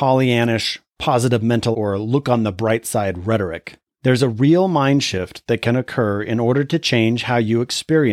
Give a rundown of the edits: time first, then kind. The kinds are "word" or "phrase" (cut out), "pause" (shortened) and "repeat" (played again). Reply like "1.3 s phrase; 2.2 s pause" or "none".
1.7 s word; 3.9 s pause